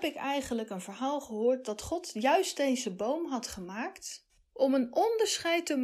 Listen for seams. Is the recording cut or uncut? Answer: uncut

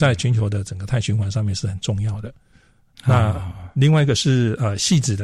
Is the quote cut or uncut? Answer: uncut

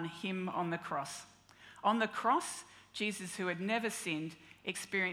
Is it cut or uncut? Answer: uncut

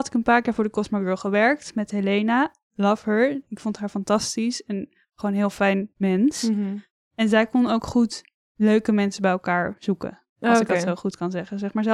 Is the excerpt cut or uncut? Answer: uncut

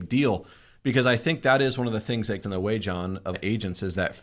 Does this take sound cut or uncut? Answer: cut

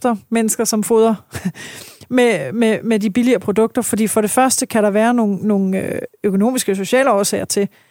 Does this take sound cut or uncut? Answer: uncut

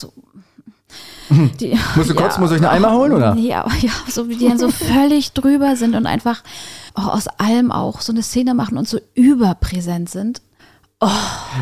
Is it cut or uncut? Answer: cut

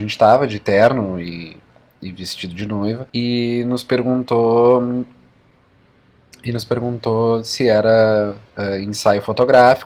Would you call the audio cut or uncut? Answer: cut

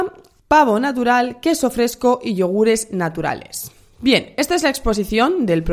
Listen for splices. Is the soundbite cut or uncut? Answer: uncut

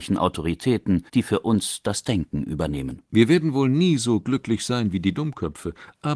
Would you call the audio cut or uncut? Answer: cut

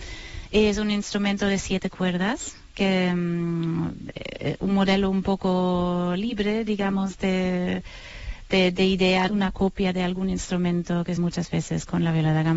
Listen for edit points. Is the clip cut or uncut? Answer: cut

